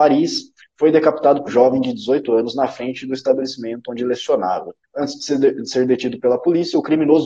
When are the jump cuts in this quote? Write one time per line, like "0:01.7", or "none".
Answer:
0:01.5
0:04.8